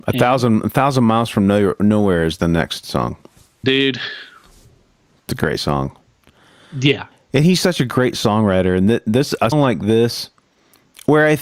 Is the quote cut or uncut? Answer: cut